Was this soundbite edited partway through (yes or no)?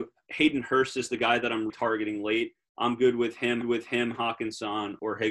yes